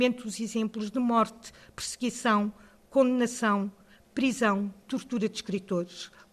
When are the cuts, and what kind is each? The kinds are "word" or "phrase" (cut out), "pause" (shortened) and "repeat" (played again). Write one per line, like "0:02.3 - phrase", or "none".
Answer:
none